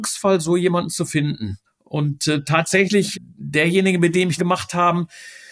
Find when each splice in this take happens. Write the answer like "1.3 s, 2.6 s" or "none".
1.7 s, 3.1 s, 4.4 s